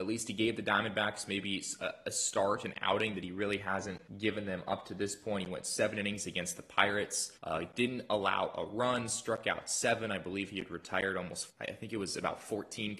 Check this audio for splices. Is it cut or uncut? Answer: cut